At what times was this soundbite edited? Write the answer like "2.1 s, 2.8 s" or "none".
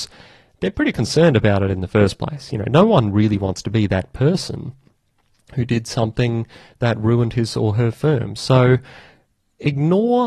none